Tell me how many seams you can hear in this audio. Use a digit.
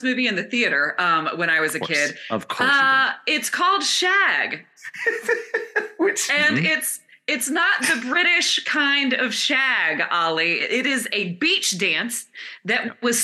0